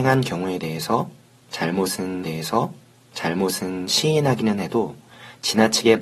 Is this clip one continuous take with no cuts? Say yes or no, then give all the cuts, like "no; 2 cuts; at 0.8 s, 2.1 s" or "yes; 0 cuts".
no; 1 cut; at 2.2 s